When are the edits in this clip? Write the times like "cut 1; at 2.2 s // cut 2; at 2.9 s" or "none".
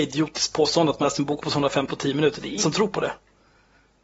cut 1; at 1.0 s // cut 2; at 1.9 s // cut 3; at 2.6 s